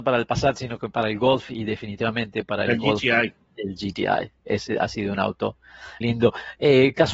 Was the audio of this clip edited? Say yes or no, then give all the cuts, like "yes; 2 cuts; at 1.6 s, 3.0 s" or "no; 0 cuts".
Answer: yes; 1 cut; at 6.0 s